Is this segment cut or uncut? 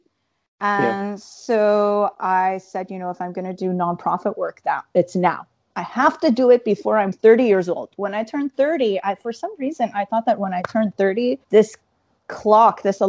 cut